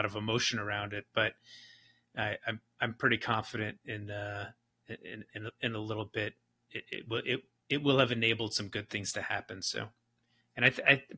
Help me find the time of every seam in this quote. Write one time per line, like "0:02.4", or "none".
none